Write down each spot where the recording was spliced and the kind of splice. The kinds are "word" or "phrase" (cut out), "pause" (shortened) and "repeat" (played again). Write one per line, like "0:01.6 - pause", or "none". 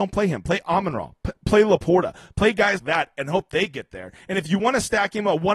0:02.8 - word